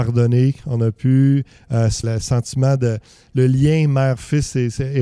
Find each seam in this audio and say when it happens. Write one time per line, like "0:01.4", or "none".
0:02.0